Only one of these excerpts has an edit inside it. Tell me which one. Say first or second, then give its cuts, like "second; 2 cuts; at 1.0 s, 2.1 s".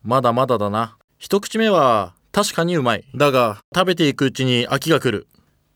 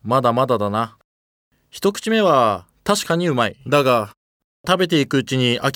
first; 2 cuts; at 1.1 s, 3.6 s